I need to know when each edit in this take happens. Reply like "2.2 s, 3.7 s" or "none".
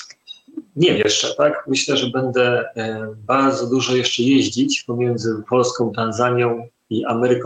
1.0 s